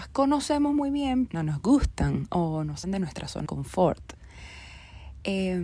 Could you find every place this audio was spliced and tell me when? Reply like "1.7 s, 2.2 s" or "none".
1.3 s, 2.8 s, 3.5 s